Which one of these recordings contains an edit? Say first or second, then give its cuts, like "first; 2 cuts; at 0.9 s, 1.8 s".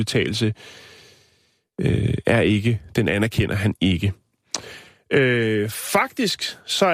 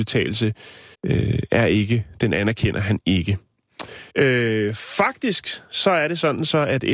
second; 2 cuts; at 0.9 s, 4.1 s